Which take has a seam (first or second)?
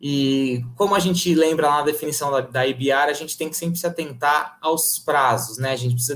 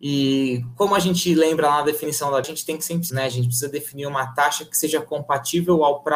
second